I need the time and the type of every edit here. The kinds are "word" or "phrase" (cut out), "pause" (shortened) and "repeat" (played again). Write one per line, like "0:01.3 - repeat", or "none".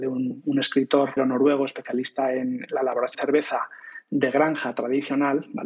0:01.2 - word
0:03.1 - word